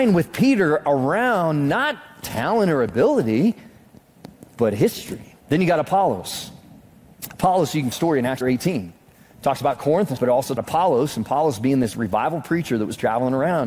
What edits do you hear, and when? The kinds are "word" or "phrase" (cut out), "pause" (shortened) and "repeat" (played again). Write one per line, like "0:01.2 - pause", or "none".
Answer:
0:05.4 - pause
0:07.9 - phrase
0:08.4 - word
0:09.1 - pause
0:10.2 - phrase
0:10.6 - phrase